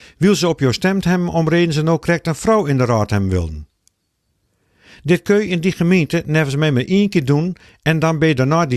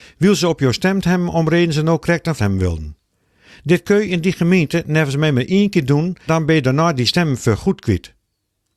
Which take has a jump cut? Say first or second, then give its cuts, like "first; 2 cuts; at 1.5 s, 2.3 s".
second; 3 cuts; at 2.4 s, 3.1 s, 6.3 s